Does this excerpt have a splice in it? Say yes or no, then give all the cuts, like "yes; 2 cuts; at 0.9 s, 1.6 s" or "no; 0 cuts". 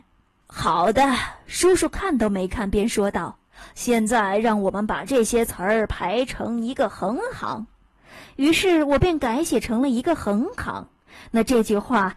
no; 0 cuts